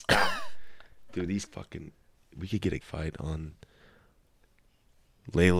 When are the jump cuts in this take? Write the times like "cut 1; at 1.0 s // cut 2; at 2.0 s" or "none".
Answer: cut 1; at 1.5 s // cut 2; at 2.8 s